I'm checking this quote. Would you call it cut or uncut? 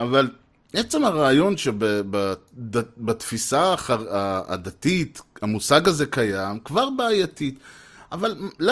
uncut